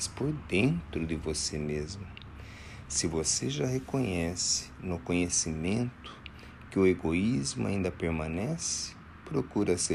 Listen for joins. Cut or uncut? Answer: uncut